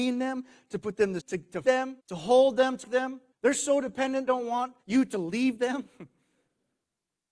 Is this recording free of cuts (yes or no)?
no